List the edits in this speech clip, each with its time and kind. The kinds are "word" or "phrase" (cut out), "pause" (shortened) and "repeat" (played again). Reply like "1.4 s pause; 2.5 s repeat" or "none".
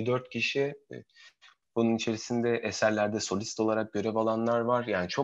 none